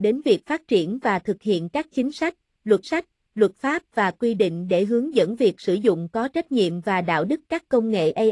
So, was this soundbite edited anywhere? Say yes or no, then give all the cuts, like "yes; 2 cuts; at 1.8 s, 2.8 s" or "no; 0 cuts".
yes; 1 cut; at 2.8 s